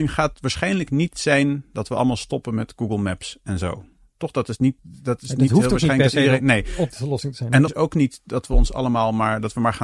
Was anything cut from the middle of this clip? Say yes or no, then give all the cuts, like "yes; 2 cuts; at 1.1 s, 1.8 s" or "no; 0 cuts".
yes; 2 cuts; at 4.8 s, 7.7 s